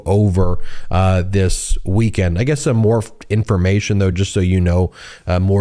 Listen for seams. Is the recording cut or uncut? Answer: uncut